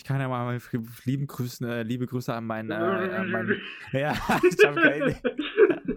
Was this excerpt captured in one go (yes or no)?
yes